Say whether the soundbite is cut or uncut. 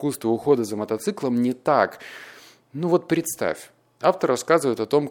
uncut